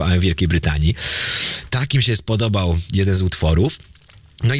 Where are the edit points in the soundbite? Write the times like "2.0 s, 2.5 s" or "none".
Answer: none